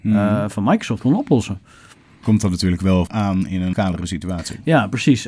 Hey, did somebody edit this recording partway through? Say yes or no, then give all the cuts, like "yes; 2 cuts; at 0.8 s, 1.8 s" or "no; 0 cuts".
yes; 4 cuts; at 1.0 s, 2.2 s, 3.1 s, 3.7 s